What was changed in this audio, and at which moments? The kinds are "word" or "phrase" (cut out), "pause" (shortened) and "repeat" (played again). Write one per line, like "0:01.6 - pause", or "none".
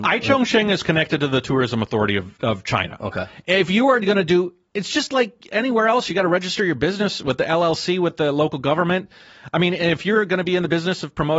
0:02.4 - word